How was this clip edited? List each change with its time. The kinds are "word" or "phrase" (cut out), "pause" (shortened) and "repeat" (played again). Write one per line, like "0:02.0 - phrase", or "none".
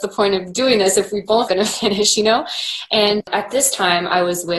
0:01.5 - word
0:03.2 - word